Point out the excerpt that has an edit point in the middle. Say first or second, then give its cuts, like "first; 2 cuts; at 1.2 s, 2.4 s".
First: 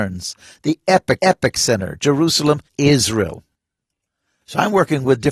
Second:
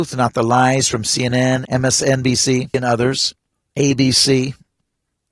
first; 2 cuts; at 1.2 s, 2.7 s